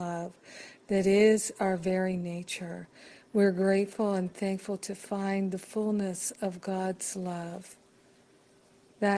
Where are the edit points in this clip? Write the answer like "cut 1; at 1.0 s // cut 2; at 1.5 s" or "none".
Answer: none